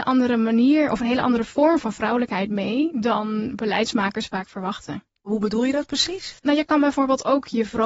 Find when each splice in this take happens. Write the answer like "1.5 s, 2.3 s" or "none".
6.4 s